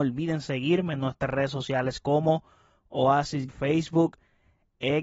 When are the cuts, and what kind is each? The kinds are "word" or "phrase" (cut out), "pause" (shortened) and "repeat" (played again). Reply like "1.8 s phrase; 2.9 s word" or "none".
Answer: 3.5 s word